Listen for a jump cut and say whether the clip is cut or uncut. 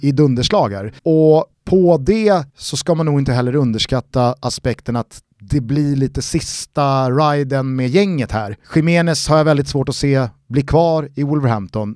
cut